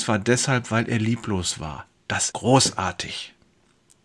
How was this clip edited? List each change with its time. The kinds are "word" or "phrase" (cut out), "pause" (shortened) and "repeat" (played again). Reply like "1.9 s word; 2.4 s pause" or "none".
2.3 s word

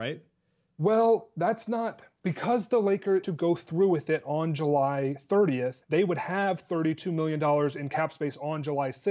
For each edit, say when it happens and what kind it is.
3.2 s phrase; 5.8 s pause

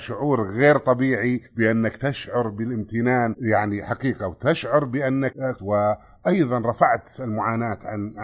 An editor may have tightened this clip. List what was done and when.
1.5 s pause; 5.6 s phrase

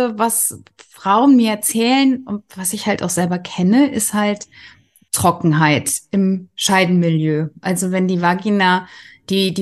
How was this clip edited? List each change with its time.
none

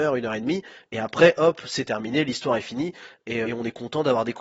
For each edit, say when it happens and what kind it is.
3.4 s word

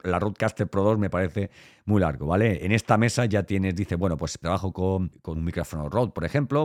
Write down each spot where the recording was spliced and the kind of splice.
5.4 s word

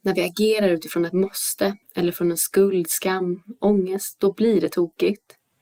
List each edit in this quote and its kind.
1.8 s pause

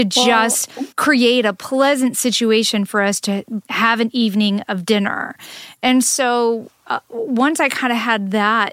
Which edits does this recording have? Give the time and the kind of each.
0.9 s pause; 3.6 s pause

